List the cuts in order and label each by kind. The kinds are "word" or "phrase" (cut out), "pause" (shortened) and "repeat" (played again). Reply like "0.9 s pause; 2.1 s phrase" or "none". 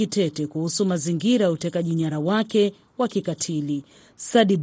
none